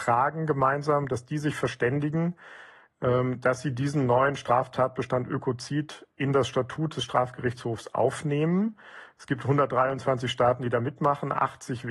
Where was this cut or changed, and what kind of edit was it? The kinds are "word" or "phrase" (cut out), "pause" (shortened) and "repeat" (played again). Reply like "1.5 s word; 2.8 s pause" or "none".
none